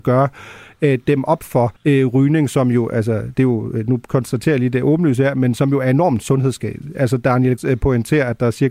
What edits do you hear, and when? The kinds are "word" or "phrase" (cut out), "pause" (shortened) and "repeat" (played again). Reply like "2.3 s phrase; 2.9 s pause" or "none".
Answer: 1.8 s pause; 7.6 s word